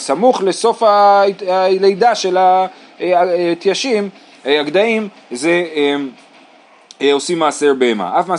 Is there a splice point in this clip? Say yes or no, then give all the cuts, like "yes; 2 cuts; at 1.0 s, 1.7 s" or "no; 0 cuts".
no; 0 cuts